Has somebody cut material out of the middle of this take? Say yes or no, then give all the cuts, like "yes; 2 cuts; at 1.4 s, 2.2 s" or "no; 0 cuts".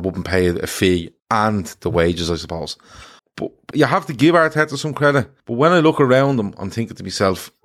yes; 4 cuts; at 1.2 s, 3.2 s, 3.7 s, 5.4 s